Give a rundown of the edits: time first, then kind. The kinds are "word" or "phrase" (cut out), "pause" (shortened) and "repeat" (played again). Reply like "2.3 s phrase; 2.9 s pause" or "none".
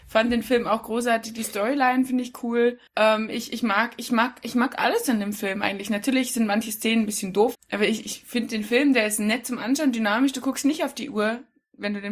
2.9 s pause; 7.5 s word; 8.0 s word